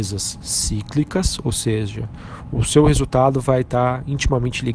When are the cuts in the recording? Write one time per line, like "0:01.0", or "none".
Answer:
none